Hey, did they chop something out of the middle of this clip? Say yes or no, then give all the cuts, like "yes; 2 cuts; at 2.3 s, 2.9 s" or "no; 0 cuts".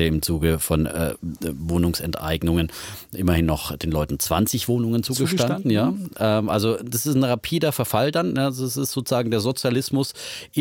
no; 0 cuts